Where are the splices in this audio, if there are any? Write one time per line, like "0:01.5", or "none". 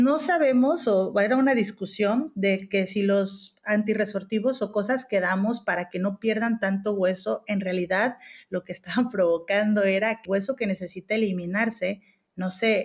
0:10.3